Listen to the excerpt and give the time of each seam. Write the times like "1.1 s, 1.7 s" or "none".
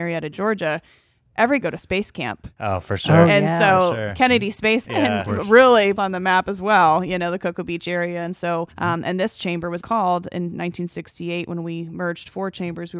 1.6 s, 4.8 s, 6.0 s, 8.7 s, 9.8 s